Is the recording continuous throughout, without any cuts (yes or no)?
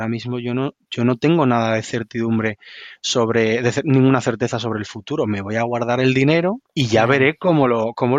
no